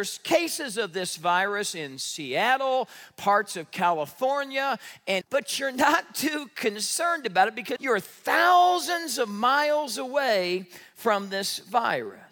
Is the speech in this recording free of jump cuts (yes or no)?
no